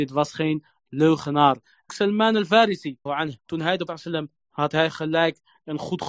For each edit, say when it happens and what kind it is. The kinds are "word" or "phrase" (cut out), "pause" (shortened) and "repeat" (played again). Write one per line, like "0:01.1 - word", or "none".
0:01.9 - word
0:03.1 - word
0:03.4 - pause
0:03.9 - word
0:04.4 - word